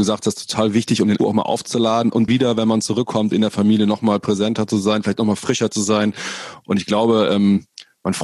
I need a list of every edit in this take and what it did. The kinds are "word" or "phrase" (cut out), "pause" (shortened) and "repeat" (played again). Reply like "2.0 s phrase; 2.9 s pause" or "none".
1.2 s word; 2.3 s word